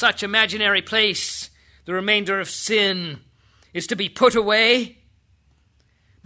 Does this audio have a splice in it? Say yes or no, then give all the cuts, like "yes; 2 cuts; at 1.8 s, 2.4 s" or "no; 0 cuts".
no; 0 cuts